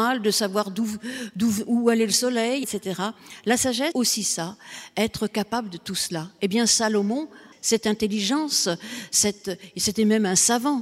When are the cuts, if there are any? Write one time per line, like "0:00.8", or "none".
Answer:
0:02.6
0:03.9
0:07.5